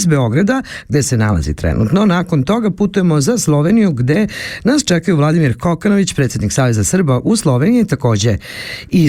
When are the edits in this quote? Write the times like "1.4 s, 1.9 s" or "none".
none